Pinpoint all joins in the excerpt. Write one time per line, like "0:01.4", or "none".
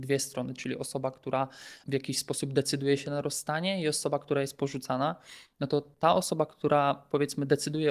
0:01.8